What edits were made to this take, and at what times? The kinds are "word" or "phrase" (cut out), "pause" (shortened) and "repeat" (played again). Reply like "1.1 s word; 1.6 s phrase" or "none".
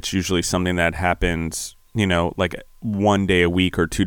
1.9 s pause